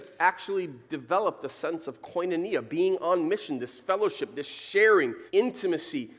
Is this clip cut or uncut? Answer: cut